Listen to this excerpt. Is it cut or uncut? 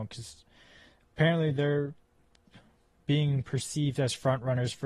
uncut